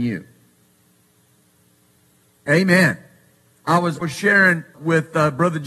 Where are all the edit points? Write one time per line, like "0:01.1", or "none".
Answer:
0:04.0
0:04.7